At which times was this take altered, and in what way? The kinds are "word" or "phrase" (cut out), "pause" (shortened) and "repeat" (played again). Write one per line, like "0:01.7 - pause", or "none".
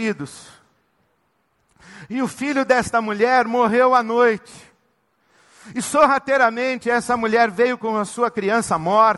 none